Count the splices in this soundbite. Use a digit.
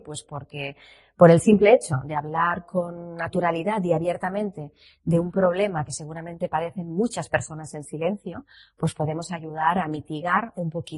0